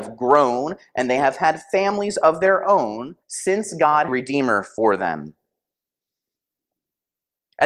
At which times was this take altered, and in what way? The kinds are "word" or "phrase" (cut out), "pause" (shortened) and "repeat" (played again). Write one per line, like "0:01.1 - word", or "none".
0:03.2 - pause
0:04.1 - phrase